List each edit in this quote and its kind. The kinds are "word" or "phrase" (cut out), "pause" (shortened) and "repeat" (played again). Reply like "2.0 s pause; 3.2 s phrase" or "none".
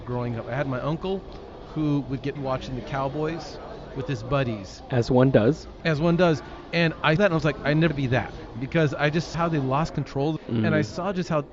2.4 s word; 7.2 s word; 7.9 s word; 9.3 s word; 10.4 s word

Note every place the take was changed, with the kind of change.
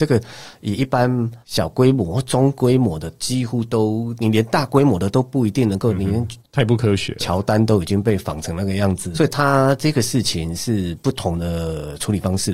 1.4 s pause; 6.4 s pause; 9.1 s word

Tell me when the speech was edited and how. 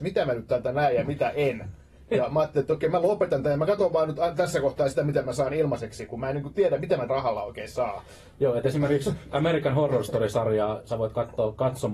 7.1 s word

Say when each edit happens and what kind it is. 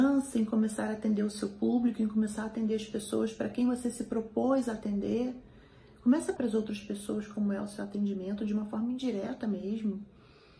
6.4 s word

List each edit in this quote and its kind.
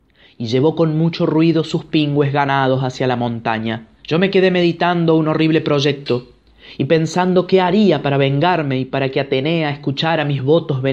4.0 s pause

